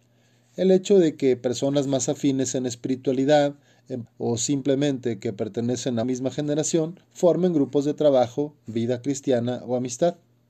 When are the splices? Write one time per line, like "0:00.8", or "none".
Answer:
0:04.0
0:06.0
0:07.0

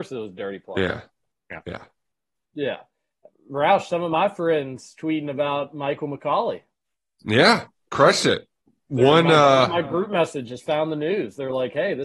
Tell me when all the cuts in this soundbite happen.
none

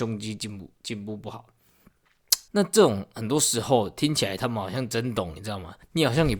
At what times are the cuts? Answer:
0:02.5

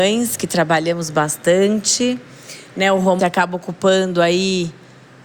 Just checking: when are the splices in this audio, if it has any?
0:03.2

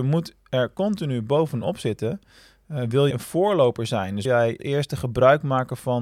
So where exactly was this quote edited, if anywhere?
0:03.1
0:04.2
0:04.6

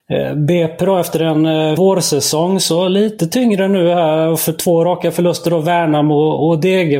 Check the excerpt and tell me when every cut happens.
0:01.8

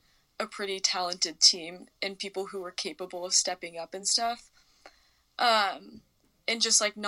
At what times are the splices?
none

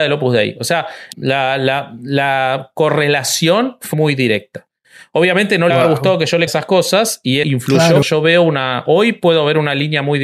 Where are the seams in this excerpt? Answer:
0:01.1
0:03.9
0:05.7
0:06.5
0:07.4
0:08.0

